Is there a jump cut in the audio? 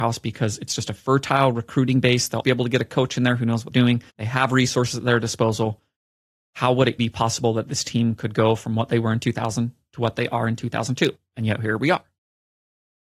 yes; 4 cuts; at 2.4 s, 3.7 s, 4.1 s, 7.0 s

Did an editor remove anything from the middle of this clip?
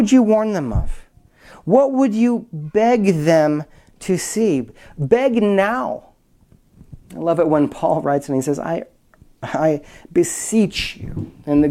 no; 0 cuts

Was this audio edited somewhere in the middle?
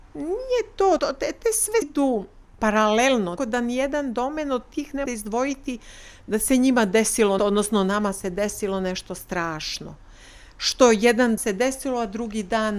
yes; 6 cuts; at 1.0 s, 1.8 s, 3.4 s, 5.1 s, 7.4 s, 11.4 s

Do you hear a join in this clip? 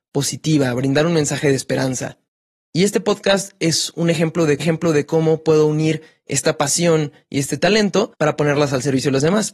yes; 3 cuts; at 2.3 s, 4.6 s, 8.1 s

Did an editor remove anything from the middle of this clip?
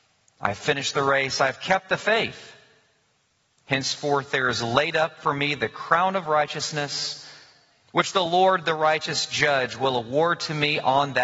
no; 0 cuts

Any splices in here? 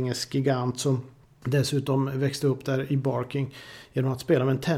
no; 0 cuts

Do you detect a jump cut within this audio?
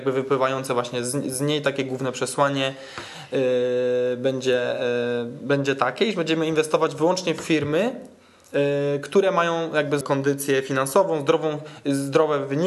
yes; 1 cut; at 10.0 s

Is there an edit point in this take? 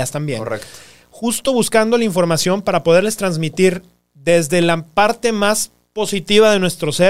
no; 0 cuts

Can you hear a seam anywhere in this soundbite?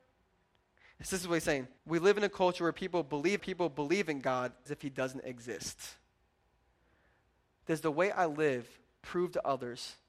yes; 3 cuts; at 1.8 s, 3.4 s, 4.7 s

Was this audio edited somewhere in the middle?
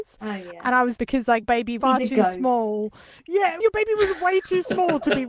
yes; 4 cuts; at 1.0 s, 1.4 s, 1.8 s, 3.6 s

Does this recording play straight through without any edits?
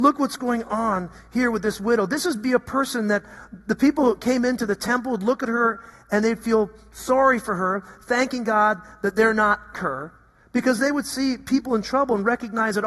no; 1 cut; at 9.7 s

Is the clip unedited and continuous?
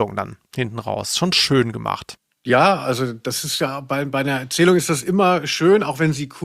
yes; 0 cuts

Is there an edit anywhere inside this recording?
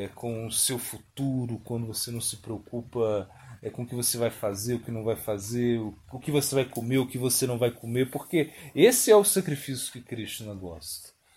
no; 0 cuts

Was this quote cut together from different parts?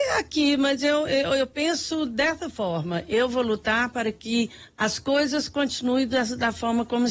no; 0 cuts

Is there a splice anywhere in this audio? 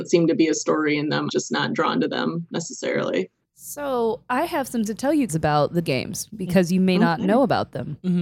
yes; 4 cuts; at 1.3 s, 4.9 s, 5.3 s, 5.8 s

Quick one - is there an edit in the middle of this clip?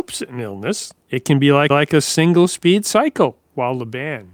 yes; 3 cuts; at 1.0 s, 1.7 s, 3.4 s

